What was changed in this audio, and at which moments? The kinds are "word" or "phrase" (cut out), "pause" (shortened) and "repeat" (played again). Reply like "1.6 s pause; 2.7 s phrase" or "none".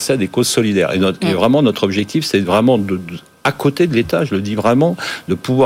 none